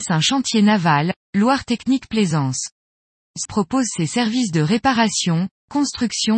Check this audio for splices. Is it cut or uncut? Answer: cut